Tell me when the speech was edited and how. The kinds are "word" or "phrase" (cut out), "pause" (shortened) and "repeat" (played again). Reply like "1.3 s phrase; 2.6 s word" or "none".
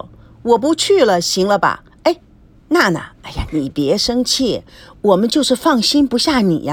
none